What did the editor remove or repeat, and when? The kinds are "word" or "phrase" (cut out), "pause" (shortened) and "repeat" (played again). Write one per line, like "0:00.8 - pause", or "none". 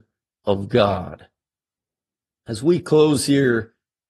none